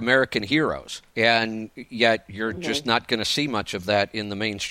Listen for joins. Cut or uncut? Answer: cut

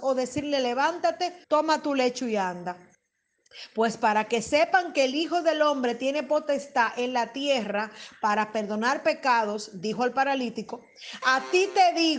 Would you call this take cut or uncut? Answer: cut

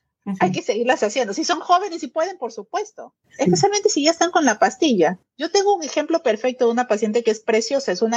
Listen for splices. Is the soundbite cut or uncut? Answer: uncut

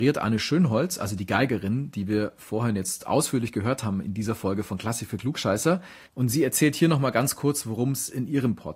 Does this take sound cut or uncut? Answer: cut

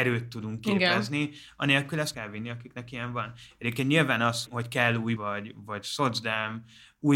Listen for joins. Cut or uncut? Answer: cut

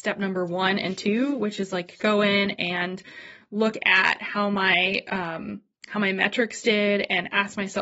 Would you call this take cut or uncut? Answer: uncut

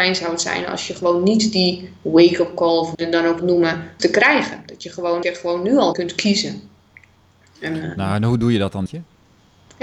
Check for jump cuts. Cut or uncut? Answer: cut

